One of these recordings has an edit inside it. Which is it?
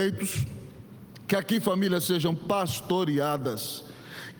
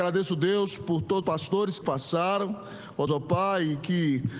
second; 3 cuts; at 1.2 s, 1.8 s, 3.1 s

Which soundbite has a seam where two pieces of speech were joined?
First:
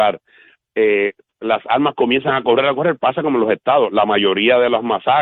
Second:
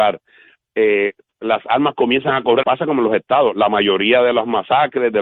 second; 1 cut; at 2.6 s

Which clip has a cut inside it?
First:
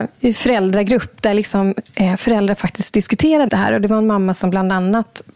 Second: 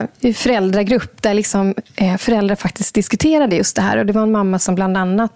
first; 1 cut; at 3.5 s

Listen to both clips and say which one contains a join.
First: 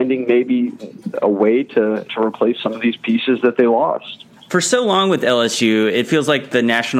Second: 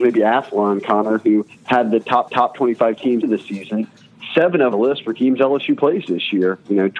second; 4 cuts; at 1.5 s, 2.3 s, 3.2 s, 4.7 s

